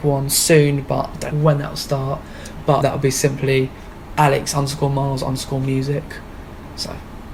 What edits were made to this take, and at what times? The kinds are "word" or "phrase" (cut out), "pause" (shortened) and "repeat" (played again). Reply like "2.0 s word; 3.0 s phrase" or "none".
1.3 s phrase; 2.8 s word